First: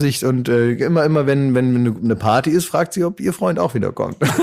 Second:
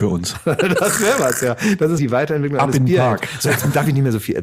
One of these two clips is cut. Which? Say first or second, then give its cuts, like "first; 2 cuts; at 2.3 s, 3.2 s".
second; 1 cut; at 2.0 s